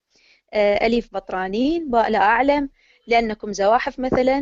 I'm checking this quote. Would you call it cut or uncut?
uncut